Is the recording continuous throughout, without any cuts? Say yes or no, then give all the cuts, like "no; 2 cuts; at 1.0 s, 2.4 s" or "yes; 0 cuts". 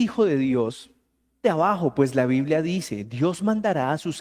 no; 1 cut; at 1.4 s